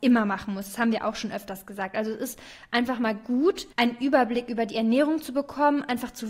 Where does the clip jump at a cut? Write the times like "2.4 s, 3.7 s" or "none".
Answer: 3.7 s